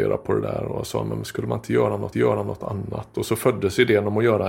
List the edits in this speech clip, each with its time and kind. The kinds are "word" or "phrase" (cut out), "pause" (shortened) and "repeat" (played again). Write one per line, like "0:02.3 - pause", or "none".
0:02.1 - repeat